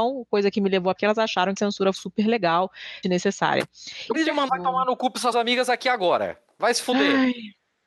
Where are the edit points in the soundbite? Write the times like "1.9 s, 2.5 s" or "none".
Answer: 1.0 s, 1.6 s, 1.9 s, 3.0 s, 4.1 s, 4.5 s, 5.3 s